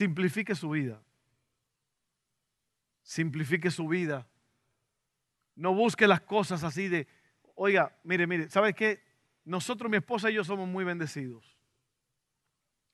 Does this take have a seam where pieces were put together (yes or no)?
no